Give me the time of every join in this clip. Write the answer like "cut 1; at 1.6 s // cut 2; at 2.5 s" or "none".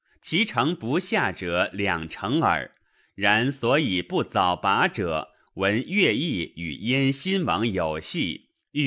none

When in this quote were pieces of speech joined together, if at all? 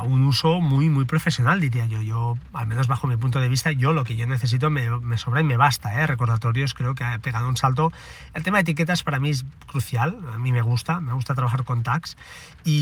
none

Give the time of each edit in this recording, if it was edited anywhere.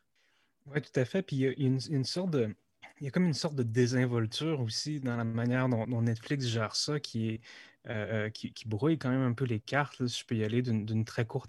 cut 1; at 5.8 s

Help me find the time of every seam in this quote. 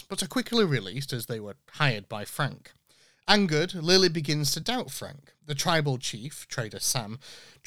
none

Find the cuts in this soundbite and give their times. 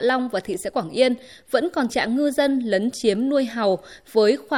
cut 1; at 1.9 s

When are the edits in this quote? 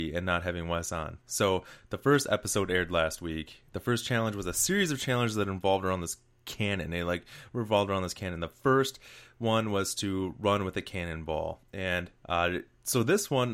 none

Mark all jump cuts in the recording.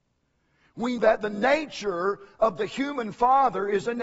cut 1; at 1.0 s

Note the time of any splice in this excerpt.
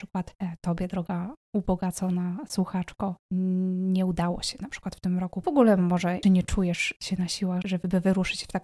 cut 1; at 5.4 s // cut 2; at 6.2 s // cut 3; at 7.6 s

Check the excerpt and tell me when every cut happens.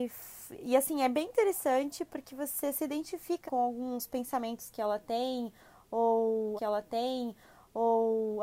cut 1; at 3.5 s // cut 2; at 6.6 s

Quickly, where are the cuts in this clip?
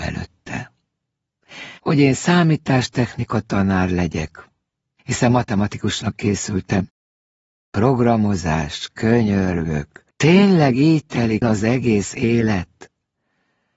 cut 1; at 1.8 s // cut 2; at 5.0 s // cut 3; at 10.1 s // cut 4; at 11.4 s

